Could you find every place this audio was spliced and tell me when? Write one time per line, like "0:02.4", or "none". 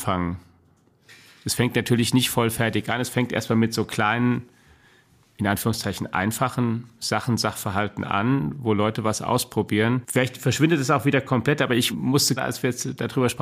0:12.4